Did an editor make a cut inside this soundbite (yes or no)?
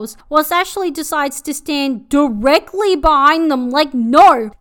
no